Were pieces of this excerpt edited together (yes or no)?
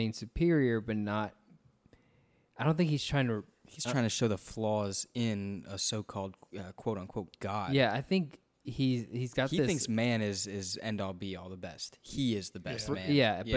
no